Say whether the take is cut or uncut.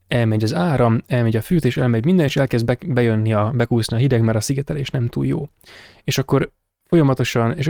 uncut